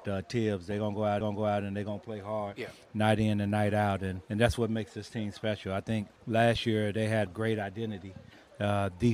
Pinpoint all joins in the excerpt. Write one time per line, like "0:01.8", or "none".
0:01.2
0:04.2
0:06.2
0:07.3